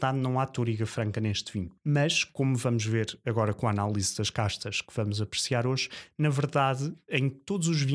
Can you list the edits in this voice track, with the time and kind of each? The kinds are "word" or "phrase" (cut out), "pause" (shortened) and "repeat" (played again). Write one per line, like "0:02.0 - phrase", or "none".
0:01.8 - pause